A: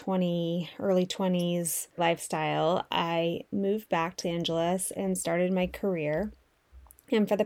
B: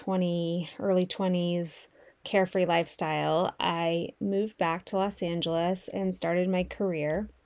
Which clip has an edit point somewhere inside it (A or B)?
A